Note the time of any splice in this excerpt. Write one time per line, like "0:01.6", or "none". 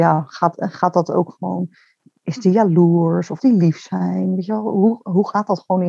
0:03.4